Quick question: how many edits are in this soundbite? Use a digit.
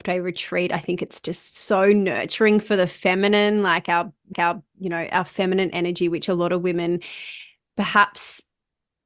1